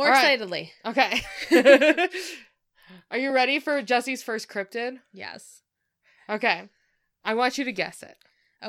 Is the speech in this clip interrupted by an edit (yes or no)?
no